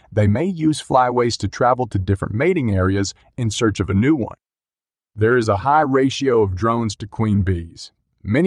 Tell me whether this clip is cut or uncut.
uncut